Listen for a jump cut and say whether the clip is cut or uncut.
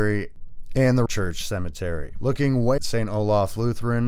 cut